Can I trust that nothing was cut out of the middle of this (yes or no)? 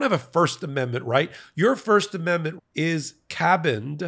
no